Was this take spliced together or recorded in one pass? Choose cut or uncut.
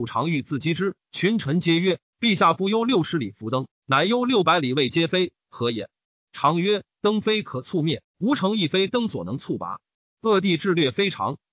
uncut